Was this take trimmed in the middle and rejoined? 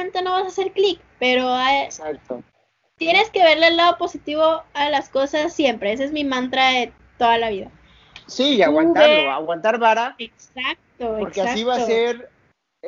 no; 0 cuts

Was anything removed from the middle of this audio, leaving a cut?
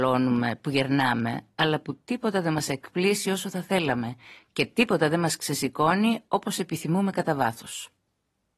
no; 0 cuts

